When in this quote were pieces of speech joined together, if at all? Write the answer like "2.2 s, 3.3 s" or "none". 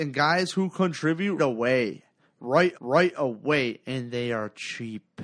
1.4 s, 2.7 s